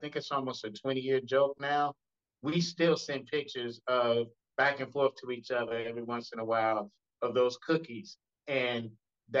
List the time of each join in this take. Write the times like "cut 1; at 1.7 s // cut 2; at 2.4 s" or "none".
none